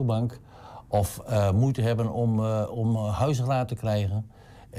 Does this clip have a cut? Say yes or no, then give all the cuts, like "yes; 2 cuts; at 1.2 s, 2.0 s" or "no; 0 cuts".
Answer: no; 0 cuts